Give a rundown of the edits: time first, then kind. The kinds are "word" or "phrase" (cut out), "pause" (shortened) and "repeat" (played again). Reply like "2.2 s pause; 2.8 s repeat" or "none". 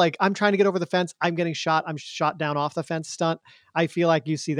none